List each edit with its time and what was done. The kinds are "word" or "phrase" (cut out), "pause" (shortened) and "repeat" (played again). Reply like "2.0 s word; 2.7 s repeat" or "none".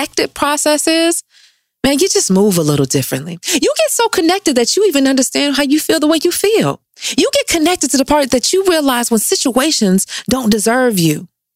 none